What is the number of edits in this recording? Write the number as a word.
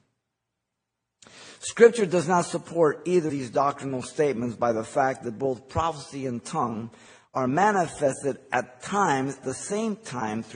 two